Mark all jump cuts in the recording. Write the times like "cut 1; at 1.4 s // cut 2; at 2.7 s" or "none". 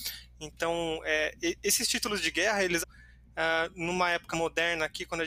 cut 1; at 2.8 s // cut 2; at 4.3 s